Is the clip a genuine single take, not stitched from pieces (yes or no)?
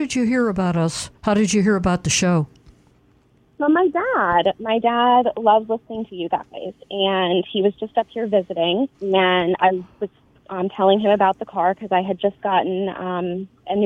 no